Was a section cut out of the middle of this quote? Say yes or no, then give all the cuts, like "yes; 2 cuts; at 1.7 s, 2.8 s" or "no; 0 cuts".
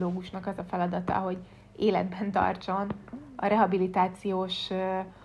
no; 0 cuts